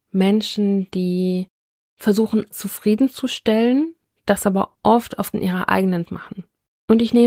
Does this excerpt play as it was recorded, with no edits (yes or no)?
no